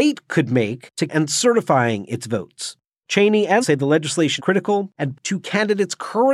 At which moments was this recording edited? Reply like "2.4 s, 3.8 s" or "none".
1.1 s, 3.6 s, 4.4 s, 5.1 s